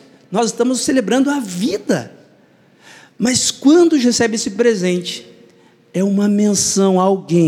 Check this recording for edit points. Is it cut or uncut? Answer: cut